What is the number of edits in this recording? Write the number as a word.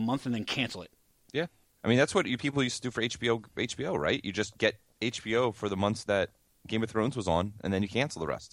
zero